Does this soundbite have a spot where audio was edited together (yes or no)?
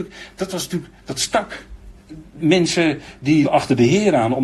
yes